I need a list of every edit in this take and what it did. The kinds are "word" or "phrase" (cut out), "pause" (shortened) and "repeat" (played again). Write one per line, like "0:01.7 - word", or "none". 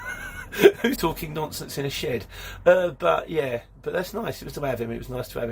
0:00.9 - phrase
0:04.5 - word